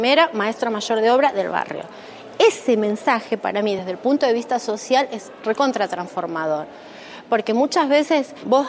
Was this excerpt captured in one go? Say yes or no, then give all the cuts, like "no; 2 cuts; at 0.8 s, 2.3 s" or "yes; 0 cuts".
yes; 0 cuts